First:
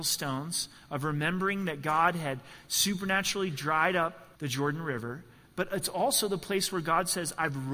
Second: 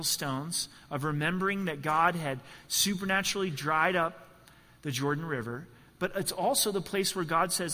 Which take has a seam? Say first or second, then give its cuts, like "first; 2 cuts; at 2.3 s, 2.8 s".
first; 1 cut; at 4.3 s